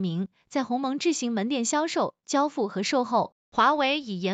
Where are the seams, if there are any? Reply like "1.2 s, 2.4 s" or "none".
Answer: 3.4 s